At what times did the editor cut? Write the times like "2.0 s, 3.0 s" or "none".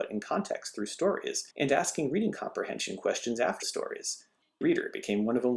1.5 s, 3.6 s, 4.6 s